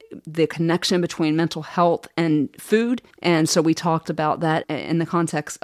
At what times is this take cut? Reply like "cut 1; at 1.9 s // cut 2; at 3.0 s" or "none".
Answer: cut 1; at 3.1 s